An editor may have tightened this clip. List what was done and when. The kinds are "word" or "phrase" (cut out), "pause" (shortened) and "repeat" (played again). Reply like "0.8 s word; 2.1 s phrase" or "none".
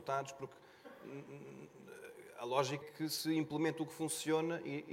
2.8 s word